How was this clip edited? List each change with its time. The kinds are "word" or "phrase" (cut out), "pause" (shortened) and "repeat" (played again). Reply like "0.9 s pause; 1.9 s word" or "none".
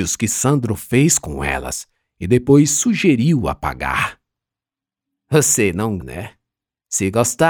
6.0 s word